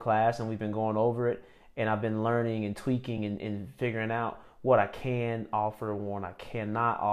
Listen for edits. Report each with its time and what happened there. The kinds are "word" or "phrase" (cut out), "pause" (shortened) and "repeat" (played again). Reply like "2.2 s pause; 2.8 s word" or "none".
none